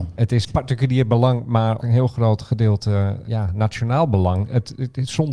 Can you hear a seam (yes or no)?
yes